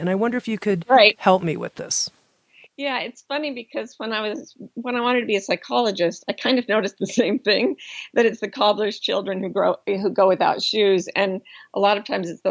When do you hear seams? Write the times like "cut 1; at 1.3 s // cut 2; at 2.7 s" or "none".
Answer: none